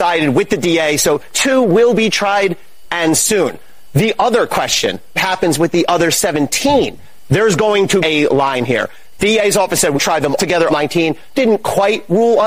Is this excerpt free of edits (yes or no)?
no